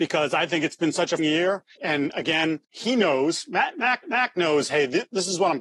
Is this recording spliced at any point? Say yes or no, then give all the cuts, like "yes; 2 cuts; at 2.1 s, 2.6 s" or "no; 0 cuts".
yes; 4 cuts; at 1.2 s, 1.8 s, 2.6 s, 4.0 s